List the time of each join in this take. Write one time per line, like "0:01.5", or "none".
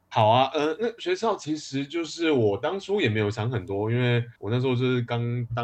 0:04.4